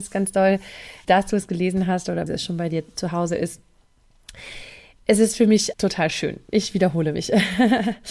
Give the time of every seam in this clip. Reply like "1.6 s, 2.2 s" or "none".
1.0 s, 2.3 s, 5.7 s